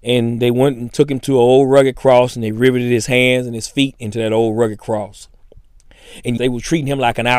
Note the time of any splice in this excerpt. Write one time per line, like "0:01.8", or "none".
0:06.4